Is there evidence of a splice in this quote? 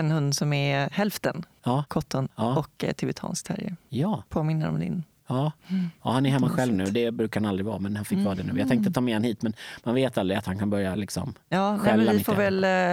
no; 0 cuts

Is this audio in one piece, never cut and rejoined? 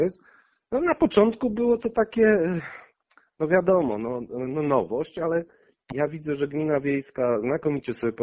yes; 0 cuts

